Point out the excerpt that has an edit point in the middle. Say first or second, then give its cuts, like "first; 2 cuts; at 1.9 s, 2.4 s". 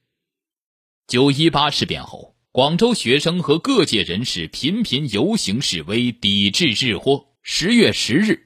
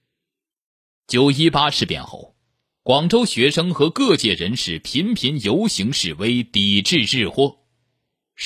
first; 2 cuts; at 2.5 s, 7.4 s